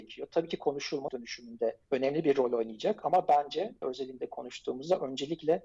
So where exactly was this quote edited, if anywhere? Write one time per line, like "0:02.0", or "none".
0:01.1
0:01.8
0:03.8